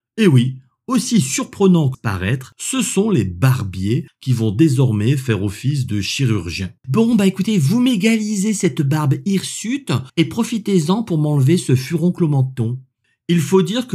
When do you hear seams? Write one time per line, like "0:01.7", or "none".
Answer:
0:01.9
0:06.8
0:10.1